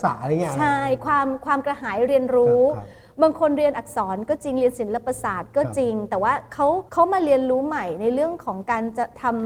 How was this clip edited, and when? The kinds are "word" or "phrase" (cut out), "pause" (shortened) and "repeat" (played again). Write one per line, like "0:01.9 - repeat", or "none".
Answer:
0:06.9 - pause